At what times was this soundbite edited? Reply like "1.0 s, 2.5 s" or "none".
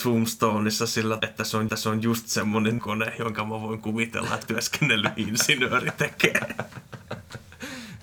1.2 s, 1.7 s, 2.8 s, 4.4 s